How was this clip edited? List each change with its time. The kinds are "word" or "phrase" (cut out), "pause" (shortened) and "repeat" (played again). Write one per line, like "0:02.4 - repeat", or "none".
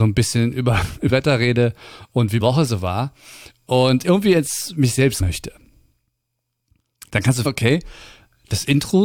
0:01.1 - word
0:02.4 - word
0:04.0 - word
0:05.2 - word
0:07.4 - word